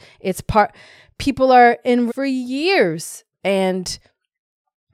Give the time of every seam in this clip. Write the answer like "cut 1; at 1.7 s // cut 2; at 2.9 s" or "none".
cut 1; at 2.1 s // cut 2; at 3.3 s